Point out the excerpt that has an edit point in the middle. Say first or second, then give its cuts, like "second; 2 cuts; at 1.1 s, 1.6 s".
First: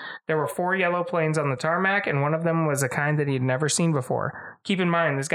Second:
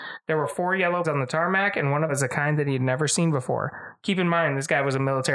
second; 2 cuts; at 1.0 s, 2.1 s